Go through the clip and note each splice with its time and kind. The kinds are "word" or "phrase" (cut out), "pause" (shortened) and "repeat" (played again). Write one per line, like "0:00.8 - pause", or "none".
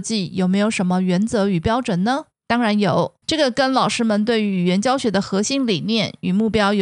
0:02.3 - pause
0:03.2 - pause